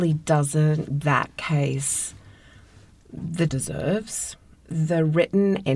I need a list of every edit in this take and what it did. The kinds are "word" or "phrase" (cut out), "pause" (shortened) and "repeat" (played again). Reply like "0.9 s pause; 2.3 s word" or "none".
1.0 s word; 3.5 s phrase